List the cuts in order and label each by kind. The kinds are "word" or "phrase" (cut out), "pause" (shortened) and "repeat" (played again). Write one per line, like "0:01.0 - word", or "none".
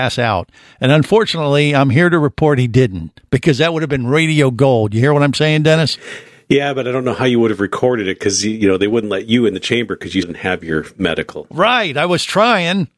0:10.2 - word